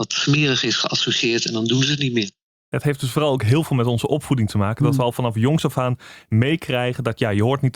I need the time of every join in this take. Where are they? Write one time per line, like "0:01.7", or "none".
none